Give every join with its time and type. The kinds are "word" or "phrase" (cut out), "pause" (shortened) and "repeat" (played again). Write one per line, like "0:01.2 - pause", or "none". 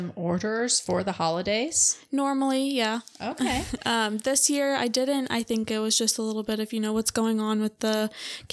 none